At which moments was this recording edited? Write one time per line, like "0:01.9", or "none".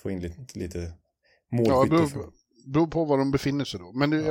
none